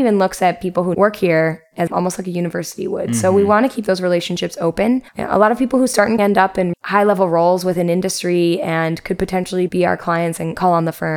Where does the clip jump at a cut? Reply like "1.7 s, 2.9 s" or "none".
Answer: 0.9 s, 1.9 s, 5.1 s, 6.2 s, 6.7 s